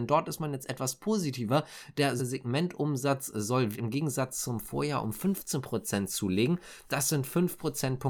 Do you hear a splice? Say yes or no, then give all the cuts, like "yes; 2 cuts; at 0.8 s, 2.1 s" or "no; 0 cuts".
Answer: yes; 2 cuts; at 2.2 s, 3.7 s